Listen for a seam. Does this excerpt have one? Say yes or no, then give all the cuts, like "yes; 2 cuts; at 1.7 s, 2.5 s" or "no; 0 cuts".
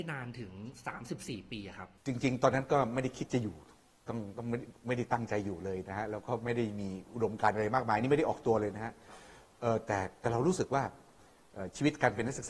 no; 0 cuts